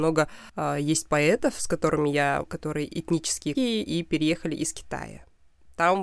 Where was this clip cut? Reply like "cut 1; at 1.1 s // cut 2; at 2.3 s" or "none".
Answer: cut 1; at 2.5 s // cut 2; at 3.5 s